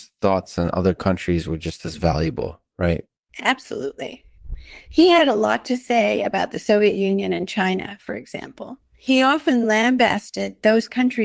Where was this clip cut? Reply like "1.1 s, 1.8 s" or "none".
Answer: 3.2 s

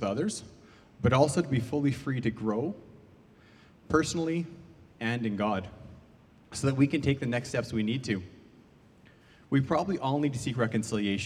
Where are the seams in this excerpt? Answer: none

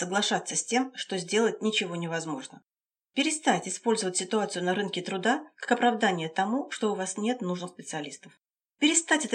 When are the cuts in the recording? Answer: none

